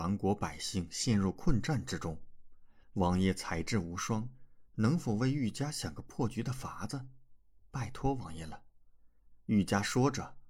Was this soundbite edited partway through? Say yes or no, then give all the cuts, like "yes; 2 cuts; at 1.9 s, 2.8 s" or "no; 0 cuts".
yes; 1 cut; at 2.8 s